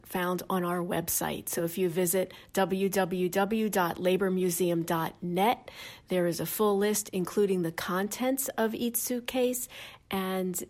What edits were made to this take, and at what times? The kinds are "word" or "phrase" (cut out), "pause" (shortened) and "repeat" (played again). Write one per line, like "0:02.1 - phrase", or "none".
none